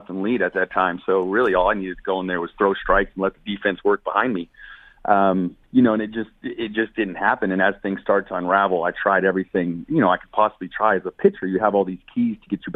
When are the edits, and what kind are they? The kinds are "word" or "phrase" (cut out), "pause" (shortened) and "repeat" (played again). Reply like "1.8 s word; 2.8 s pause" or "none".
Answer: 5.6 s pause